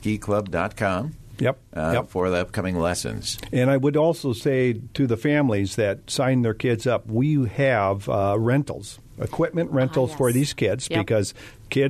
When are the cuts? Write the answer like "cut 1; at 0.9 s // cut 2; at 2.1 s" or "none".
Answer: none